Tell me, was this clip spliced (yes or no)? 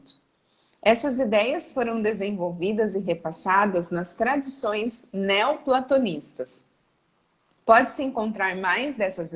no